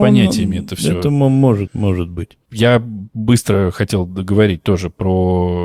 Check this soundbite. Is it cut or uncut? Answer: cut